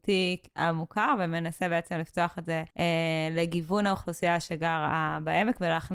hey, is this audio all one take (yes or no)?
no